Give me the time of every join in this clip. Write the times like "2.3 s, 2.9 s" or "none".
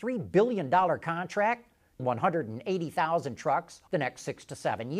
2.0 s, 3.9 s